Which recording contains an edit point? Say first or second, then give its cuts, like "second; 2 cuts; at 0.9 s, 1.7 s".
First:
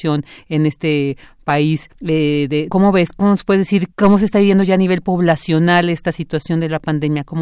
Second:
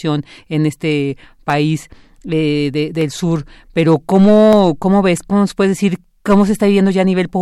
first; 3 cuts; at 1.9 s, 2.7 s, 3.9 s